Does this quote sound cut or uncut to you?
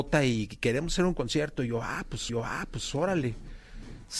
cut